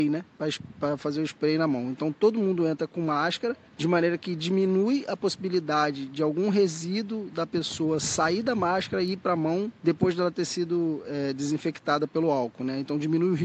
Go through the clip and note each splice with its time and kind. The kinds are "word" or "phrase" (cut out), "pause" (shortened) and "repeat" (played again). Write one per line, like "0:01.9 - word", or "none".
0:03.7 - pause
0:09.8 - pause